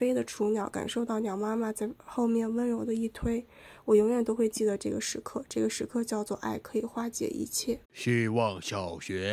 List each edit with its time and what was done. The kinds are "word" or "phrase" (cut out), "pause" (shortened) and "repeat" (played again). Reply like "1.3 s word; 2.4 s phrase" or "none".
7.8 s pause